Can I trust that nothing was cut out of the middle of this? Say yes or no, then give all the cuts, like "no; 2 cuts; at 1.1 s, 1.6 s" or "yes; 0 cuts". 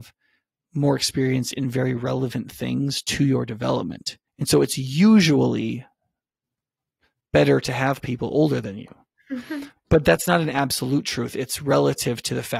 no; 1 cut; at 4.3 s